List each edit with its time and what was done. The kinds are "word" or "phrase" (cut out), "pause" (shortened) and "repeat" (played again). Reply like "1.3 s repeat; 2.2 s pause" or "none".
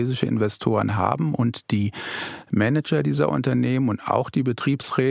none